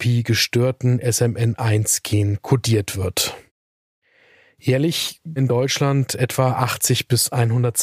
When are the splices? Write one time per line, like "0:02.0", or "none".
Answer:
0:05.4